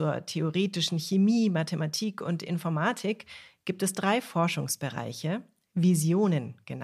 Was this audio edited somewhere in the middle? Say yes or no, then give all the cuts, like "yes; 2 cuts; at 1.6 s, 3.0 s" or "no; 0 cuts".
no; 0 cuts